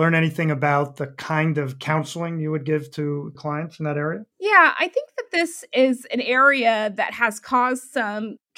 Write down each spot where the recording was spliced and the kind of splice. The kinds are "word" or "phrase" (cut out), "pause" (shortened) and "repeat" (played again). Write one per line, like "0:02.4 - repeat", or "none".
0:04.3 - pause